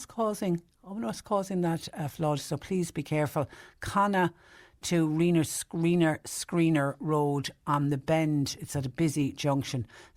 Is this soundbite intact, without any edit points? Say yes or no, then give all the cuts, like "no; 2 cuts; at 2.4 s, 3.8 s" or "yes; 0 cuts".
yes; 0 cuts